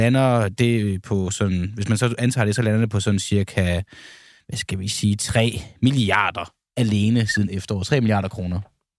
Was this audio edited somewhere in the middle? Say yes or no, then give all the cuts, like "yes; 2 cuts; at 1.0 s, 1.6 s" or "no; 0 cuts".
no; 0 cuts